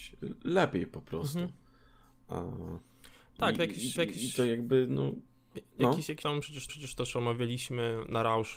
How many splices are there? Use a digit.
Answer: 3